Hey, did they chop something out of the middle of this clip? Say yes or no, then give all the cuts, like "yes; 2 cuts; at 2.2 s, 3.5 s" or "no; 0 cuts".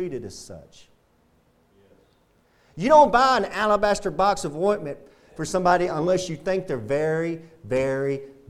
no; 0 cuts